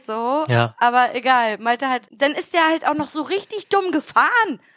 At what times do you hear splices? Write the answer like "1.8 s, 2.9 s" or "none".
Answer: 2.1 s